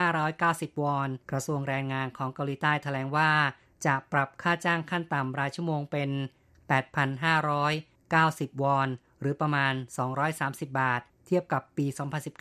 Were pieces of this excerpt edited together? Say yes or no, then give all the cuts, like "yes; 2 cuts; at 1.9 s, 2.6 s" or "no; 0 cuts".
yes; 1 cut; at 1.2 s